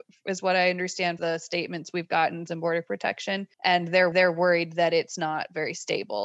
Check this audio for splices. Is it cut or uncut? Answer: cut